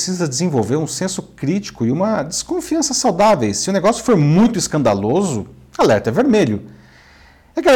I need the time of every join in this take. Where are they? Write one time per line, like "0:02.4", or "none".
none